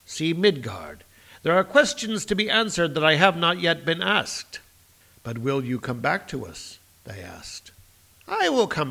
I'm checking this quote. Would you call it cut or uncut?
uncut